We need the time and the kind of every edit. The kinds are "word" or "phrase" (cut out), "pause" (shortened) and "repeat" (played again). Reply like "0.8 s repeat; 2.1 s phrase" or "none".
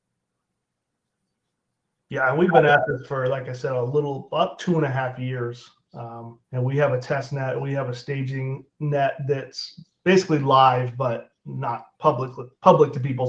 6.4 s pause; 8.7 s pause; 11.9 s pause